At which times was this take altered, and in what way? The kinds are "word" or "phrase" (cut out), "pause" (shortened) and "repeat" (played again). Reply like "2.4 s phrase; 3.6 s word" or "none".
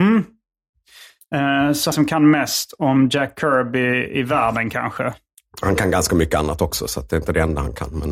1.9 s phrase